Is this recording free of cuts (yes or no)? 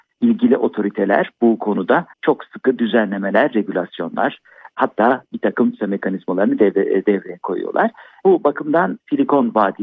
no